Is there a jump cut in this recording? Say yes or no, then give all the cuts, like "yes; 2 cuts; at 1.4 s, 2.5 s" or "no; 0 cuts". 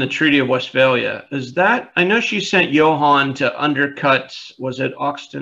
no; 0 cuts